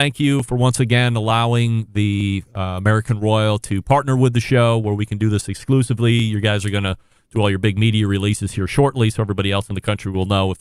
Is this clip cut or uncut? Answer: uncut